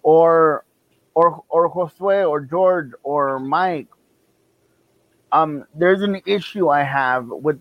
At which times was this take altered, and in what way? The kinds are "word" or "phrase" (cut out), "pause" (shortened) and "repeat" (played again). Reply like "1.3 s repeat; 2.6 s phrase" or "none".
none